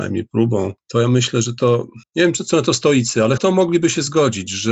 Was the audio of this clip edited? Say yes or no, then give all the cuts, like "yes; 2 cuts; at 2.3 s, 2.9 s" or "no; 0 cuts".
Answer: yes; 1 cut; at 3.4 s